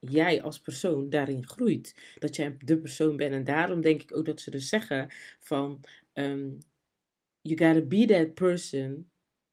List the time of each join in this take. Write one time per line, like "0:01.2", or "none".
none